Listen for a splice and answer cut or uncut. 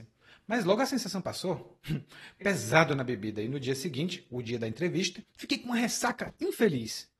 cut